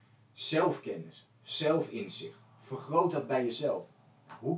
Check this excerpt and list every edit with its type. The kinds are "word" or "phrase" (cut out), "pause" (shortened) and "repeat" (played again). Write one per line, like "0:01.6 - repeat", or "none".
none